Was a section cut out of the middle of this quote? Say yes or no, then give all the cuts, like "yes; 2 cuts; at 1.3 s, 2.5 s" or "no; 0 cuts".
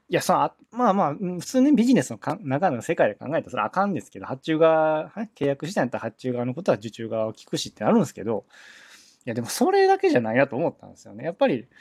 no; 0 cuts